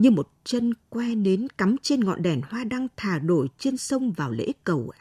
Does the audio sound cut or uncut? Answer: uncut